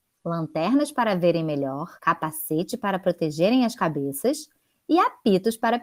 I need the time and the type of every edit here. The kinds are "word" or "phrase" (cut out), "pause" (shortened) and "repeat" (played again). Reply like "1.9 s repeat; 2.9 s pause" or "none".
2.0 s pause